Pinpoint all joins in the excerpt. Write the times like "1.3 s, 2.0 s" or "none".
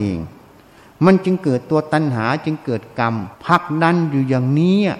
3.3 s